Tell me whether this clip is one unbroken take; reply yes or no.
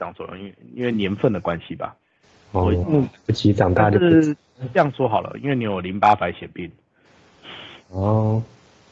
yes